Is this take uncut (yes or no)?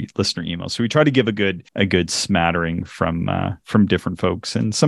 no